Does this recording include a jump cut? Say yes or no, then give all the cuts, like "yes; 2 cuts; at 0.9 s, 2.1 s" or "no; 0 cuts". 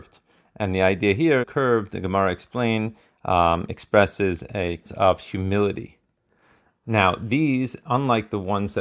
yes; 2 cuts; at 1.4 s, 4.9 s